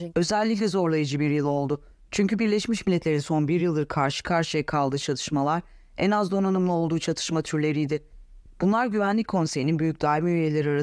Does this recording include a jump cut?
no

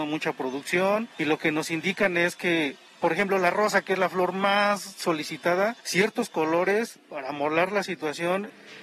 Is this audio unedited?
yes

